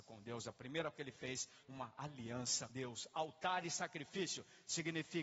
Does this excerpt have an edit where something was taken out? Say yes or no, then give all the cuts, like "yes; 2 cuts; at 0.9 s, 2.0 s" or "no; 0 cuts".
yes; 3 cuts; at 0.9 s, 1.6 s, 2.7 s